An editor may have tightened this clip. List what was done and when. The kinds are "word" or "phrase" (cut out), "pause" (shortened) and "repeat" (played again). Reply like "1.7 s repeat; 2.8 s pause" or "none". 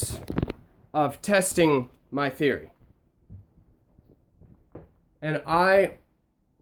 none